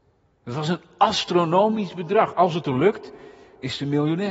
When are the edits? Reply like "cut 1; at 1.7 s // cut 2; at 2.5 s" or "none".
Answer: none